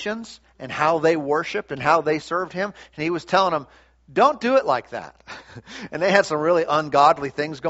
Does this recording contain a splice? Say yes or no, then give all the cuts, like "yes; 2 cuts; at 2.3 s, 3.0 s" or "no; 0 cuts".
no; 0 cuts